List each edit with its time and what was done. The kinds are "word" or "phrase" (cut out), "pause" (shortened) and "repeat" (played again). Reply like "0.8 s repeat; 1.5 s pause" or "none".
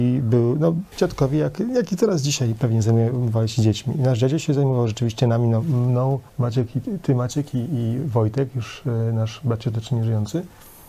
6.3 s pause